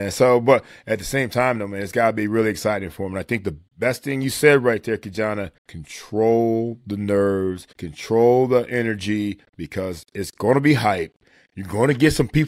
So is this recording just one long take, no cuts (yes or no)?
no